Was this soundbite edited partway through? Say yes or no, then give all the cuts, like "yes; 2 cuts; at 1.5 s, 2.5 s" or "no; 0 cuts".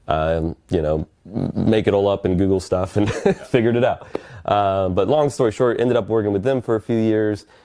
no; 0 cuts